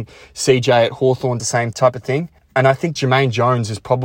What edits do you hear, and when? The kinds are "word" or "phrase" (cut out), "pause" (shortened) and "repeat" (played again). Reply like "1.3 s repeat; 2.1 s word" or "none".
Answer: 1.4 s word; 1.7 s word; 2.4 s pause; 3.0 s word